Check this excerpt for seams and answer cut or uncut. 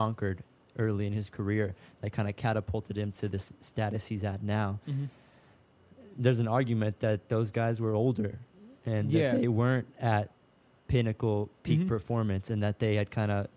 uncut